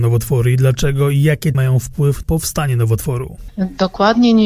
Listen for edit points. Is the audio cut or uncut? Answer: cut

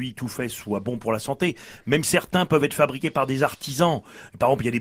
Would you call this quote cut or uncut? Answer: cut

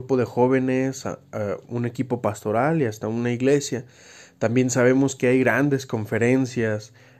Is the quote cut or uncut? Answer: uncut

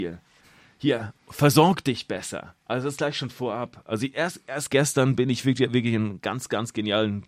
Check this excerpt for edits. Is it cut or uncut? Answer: uncut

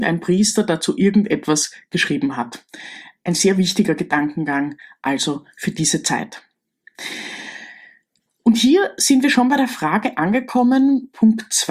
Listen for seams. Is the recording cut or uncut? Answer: uncut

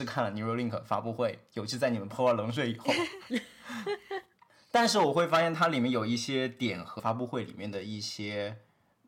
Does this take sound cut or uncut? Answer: cut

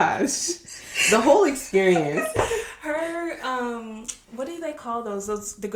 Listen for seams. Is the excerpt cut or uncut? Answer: cut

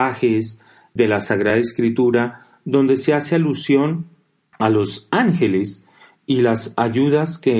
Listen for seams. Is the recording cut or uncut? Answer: uncut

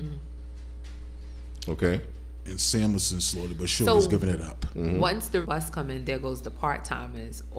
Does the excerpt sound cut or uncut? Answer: cut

